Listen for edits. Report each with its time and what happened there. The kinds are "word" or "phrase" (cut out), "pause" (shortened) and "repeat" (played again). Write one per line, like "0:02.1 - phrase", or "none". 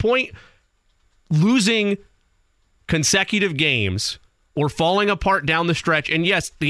none